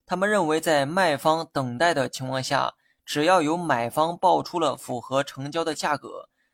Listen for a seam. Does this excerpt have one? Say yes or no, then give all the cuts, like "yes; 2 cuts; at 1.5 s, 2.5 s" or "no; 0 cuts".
no; 0 cuts